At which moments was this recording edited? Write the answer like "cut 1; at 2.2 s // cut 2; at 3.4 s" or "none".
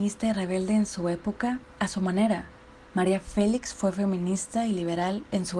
none